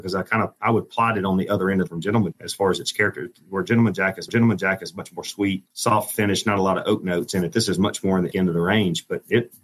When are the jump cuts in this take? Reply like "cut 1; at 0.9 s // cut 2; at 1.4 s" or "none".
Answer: cut 1; at 1.9 s // cut 2; at 2.3 s // cut 3; at 4.3 s // cut 4; at 5.7 s // cut 5; at 8.3 s